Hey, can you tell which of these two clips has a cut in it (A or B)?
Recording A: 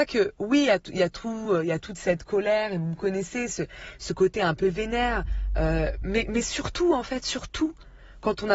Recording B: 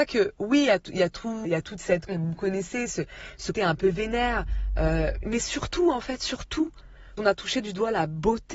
B